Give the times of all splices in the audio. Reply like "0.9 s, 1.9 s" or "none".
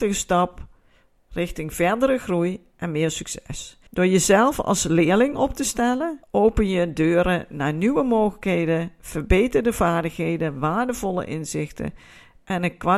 3.9 s, 6.2 s